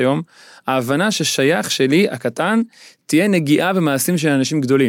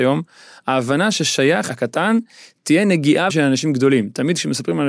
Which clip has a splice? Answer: second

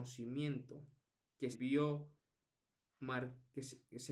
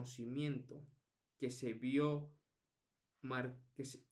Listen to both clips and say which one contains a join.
first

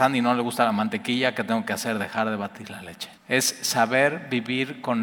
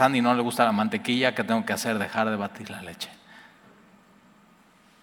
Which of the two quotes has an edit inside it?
first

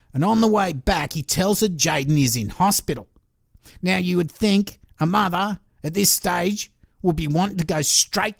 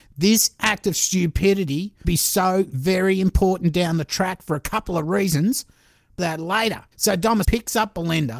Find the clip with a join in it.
second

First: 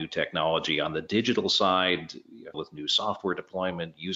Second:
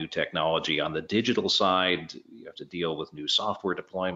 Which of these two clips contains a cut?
first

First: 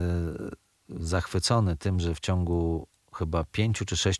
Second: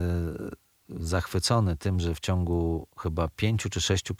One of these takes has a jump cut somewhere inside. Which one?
second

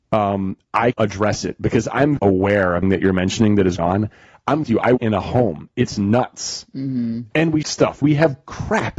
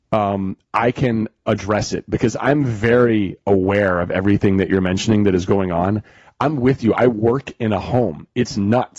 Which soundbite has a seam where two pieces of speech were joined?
first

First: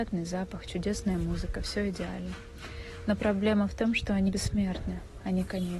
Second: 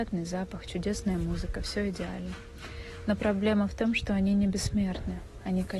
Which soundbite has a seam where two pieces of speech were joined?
first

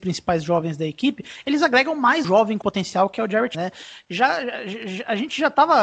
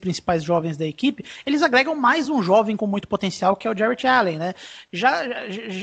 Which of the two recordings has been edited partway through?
first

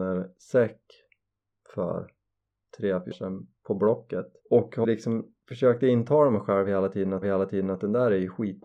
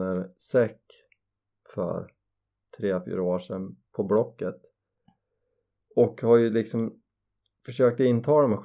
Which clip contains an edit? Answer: first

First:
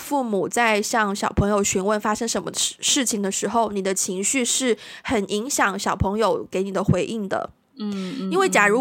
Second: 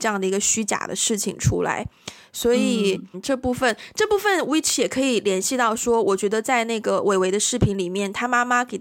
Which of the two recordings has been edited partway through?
second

